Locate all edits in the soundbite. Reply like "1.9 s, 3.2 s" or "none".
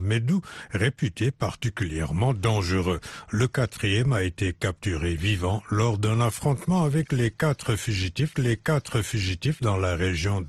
8.3 s